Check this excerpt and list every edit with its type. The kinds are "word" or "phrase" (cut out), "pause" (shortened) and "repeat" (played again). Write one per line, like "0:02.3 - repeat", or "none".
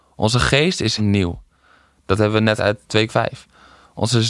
0:01.0 - word
0:02.6 - word
0:03.1 - word